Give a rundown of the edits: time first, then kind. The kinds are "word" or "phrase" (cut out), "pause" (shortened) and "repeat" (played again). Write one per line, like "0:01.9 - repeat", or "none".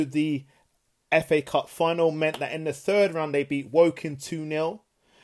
none